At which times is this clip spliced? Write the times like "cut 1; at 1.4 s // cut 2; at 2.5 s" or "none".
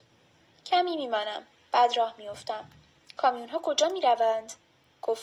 none